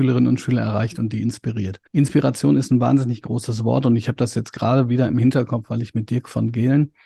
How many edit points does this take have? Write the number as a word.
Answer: one